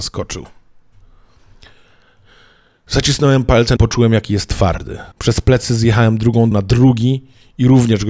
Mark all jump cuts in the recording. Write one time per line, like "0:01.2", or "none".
0:03.8
0:05.1
0:06.5

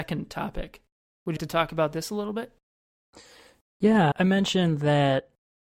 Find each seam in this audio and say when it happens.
0:01.4
0:04.1

